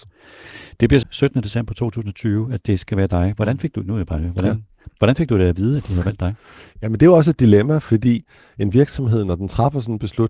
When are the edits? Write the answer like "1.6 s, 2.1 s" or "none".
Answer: 1.0 s